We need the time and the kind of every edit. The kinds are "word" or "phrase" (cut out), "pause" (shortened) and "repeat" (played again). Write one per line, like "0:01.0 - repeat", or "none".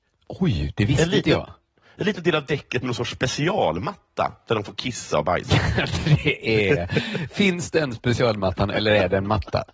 none